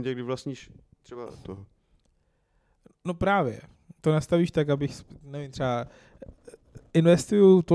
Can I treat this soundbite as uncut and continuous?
no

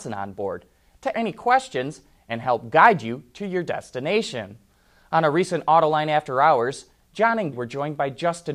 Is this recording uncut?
no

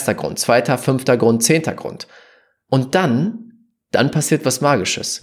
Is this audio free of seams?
yes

